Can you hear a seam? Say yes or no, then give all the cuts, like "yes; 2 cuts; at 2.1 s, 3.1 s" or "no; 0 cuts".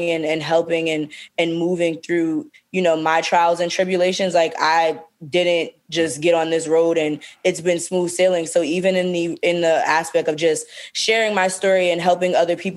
no; 0 cuts